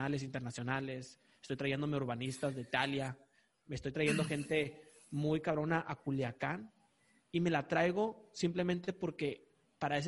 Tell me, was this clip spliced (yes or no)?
no